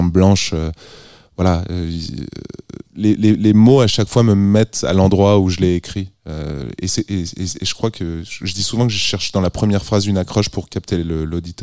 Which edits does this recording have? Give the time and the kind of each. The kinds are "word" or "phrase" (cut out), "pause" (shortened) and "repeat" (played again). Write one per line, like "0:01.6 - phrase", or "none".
0:02.9 - pause